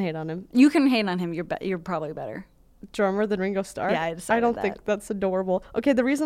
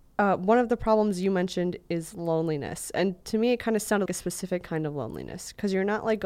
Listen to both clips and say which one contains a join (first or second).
second